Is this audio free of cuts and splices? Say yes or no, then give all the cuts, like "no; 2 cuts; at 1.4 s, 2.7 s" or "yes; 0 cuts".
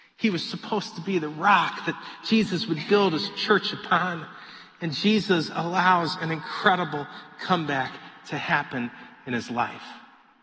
yes; 0 cuts